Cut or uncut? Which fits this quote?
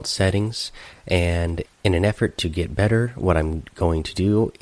cut